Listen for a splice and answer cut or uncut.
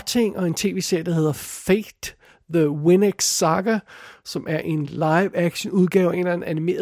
uncut